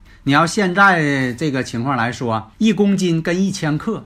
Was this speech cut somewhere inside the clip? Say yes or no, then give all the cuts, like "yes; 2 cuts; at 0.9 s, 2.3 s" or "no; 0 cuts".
yes; 1 cut; at 2.5 s